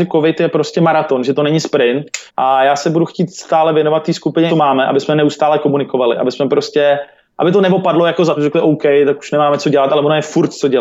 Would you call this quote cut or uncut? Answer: cut